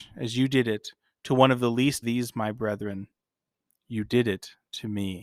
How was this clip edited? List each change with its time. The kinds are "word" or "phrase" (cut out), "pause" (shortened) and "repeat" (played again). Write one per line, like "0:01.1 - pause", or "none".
0:02.0 - word